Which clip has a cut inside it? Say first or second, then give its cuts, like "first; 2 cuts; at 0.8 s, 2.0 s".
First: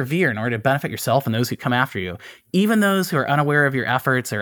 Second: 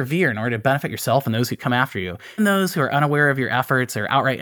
second; 1 cut; at 2.4 s